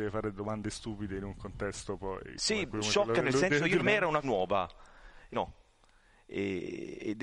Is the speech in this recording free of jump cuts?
no; 3 cuts; at 3.8 s, 4.2 s, 5.3 s

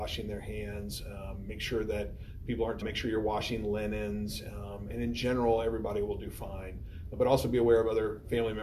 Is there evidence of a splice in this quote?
yes; 1 cut; at 2.8 s

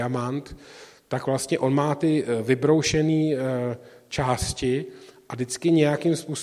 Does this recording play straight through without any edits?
yes; 0 cuts

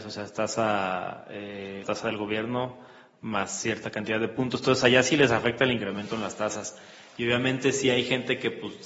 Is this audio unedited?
no; 1 cut; at 1.8 s

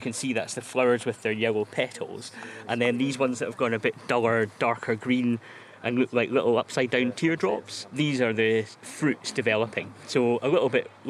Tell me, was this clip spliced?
no; 0 cuts

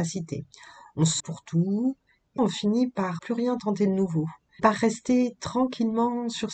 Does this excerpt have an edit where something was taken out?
yes; 4 cuts; at 1.2 s, 2.4 s, 3.2 s, 4.6 s

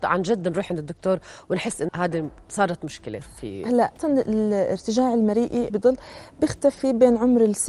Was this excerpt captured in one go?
no; 4 cuts; at 1.9 s, 3.2 s, 4.0 s, 5.7 s

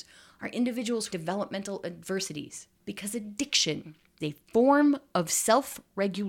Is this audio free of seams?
no; 3 cuts; at 1.1 s, 2.7 s, 4.2 s

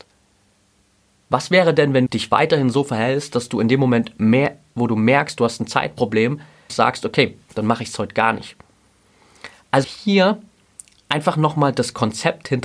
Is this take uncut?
no; 3 cuts; at 2.1 s, 6.7 s, 9.8 s

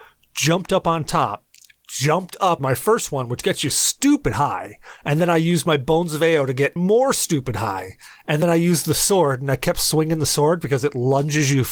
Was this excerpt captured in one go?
no; 3 cuts; at 1.5 s, 2.6 s, 6.8 s

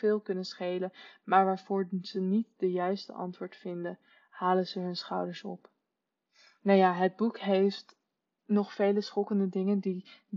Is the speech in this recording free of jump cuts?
yes; 0 cuts

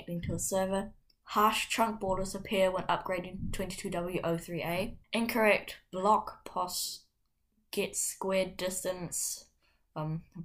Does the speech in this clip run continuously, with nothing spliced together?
no; 2 cuts; at 1.0 s, 5.0 s

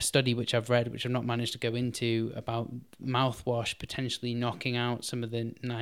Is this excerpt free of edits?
yes; 0 cuts

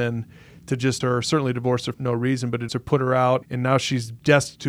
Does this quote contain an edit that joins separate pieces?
yes; 4 cuts; at 1.0 s, 1.9 s, 2.7 s, 3.4 s

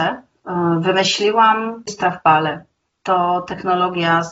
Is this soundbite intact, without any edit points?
no; 1 cut; at 1.9 s

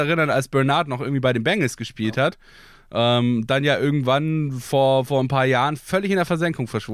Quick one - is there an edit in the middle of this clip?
no; 0 cuts

